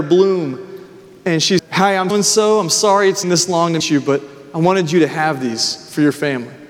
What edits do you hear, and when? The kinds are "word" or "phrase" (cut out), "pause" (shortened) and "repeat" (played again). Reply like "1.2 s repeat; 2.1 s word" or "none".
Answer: 1.6 s word; 2.1 s word; 3.2 s word; 3.8 s word